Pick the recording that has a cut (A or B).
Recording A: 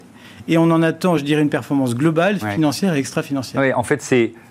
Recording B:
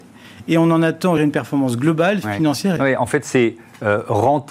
B